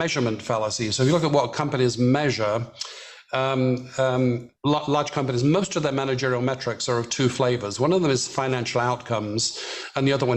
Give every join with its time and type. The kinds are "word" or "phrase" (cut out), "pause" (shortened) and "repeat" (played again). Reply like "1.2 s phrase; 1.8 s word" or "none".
4.6 s pause